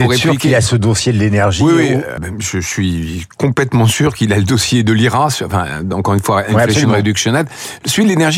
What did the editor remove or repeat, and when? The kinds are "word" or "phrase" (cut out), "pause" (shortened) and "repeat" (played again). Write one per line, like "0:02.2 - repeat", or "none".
0:02.2 - word